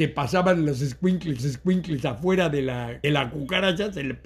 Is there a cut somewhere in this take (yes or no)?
yes